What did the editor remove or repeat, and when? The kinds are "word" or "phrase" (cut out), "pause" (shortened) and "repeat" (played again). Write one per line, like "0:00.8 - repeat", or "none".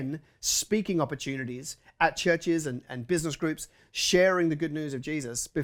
none